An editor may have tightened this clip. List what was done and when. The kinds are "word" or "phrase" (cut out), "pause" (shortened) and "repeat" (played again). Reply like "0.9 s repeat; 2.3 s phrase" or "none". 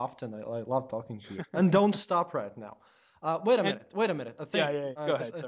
none